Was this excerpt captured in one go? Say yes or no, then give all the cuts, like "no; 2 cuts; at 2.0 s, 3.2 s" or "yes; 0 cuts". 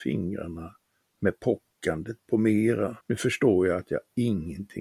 no; 2 cuts; at 1.0 s, 3.0 s